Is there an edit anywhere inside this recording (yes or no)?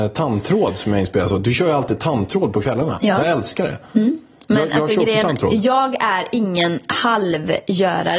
no